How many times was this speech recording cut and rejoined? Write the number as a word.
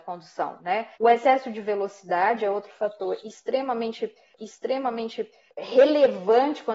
two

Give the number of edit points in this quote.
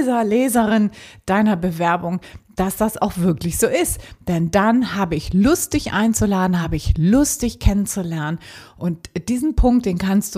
zero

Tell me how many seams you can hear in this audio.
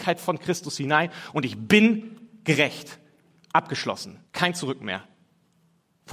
one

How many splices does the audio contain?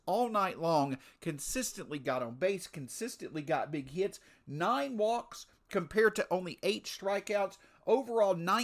zero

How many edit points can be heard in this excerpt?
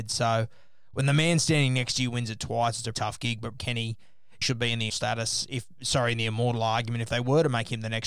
four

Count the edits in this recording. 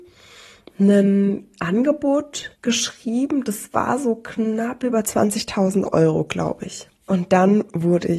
two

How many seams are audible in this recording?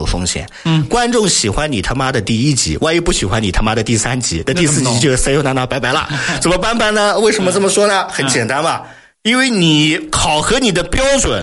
zero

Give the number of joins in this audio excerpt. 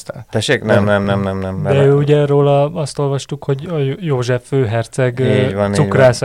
zero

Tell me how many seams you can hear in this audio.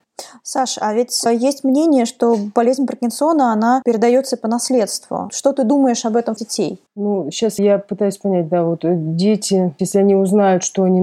three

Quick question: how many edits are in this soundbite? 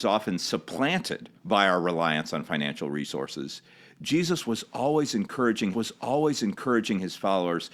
two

